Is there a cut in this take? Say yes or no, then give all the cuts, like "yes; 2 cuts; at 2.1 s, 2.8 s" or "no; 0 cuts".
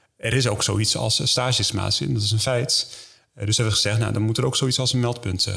no; 0 cuts